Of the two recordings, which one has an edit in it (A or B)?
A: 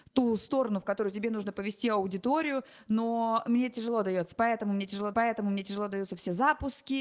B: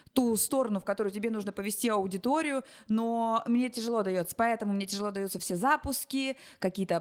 A